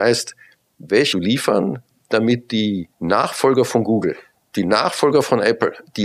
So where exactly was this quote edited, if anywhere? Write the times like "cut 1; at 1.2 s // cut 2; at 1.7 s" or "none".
cut 1; at 1.1 s // cut 2; at 2.9 s